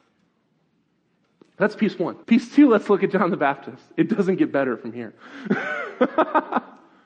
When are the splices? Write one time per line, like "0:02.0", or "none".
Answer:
0:02.2